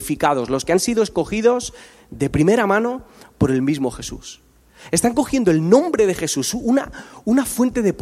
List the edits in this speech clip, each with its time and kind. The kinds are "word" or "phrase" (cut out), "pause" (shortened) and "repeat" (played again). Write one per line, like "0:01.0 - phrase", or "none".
none